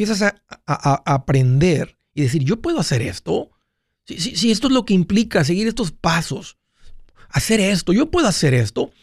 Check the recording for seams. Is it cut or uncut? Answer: uncut